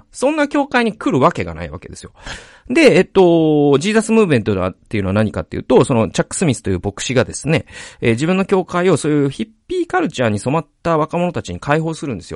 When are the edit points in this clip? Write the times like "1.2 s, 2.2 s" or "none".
none